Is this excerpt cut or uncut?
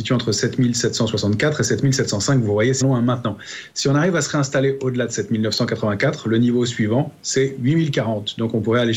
cut